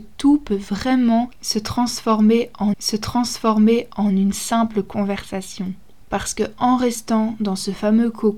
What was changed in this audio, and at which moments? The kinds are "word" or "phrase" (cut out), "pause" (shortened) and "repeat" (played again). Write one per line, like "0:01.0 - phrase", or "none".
0:02.7 - repeat